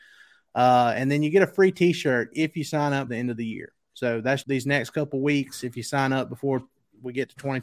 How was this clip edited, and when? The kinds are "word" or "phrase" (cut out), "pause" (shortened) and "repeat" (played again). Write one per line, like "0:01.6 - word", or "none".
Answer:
0:03.1 - word
0:04.4 - word